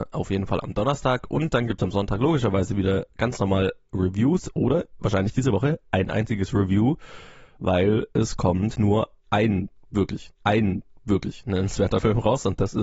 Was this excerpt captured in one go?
no; 2 cuts; at 8.7 s, 10.3 s

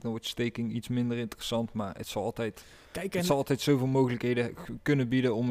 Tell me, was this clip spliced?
no; 0 cuts

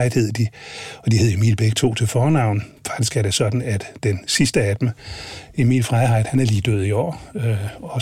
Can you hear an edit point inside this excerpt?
no; 0 cuts

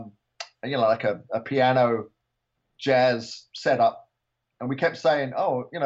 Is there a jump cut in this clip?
no; 0 cuts

